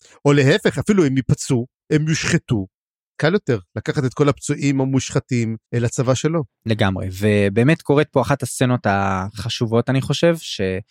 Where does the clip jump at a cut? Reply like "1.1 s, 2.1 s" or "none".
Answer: 3.2 s, 5.6 s